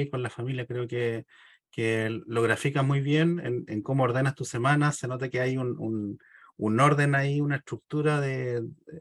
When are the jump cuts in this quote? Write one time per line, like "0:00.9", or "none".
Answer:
none

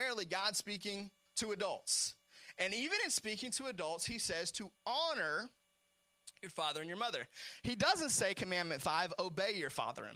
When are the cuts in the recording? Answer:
0:01.3

